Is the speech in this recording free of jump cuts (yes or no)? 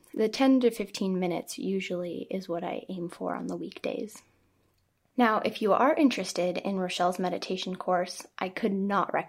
yes